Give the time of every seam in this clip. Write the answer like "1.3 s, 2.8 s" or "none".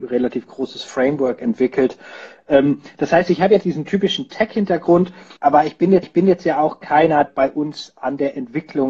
3.6 s, 5.4 s, 6.0 s, 7.3 s